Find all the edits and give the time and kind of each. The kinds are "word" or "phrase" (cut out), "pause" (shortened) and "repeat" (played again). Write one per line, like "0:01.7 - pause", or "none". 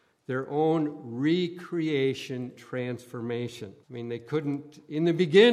0:02.6 - word
0:03.8 - pause